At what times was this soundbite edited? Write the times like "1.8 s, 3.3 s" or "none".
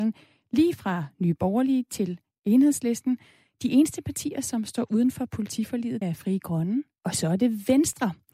6.0 s, 7.0 s